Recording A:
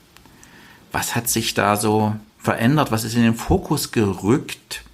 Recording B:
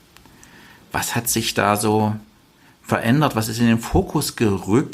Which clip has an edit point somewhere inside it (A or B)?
A